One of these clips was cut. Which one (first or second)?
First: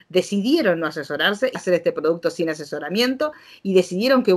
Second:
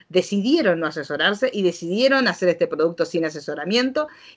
first